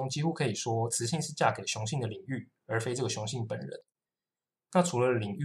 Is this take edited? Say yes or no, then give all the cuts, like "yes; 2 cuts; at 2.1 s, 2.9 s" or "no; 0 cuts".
no; 0 cuts